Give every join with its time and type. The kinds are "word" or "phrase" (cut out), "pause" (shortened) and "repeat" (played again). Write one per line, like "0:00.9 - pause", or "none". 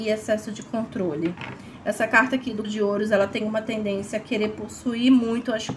0:02.6 - word